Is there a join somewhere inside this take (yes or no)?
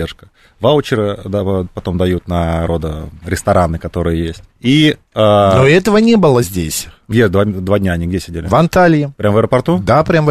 yes